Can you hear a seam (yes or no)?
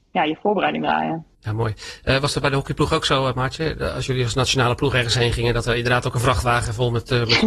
yes